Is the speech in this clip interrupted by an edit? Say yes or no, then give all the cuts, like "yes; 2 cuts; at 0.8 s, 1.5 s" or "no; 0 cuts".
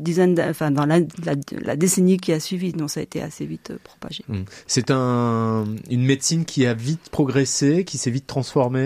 no; 0 cuts